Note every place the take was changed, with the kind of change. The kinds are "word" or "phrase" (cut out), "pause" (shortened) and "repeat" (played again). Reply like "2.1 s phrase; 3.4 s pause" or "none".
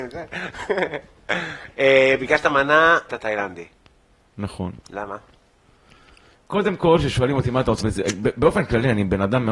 3.1 s word; 7.8 s word